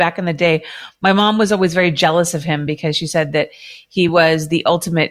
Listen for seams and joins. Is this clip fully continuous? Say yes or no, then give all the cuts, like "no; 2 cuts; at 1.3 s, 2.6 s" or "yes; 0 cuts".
yes; 0 cuts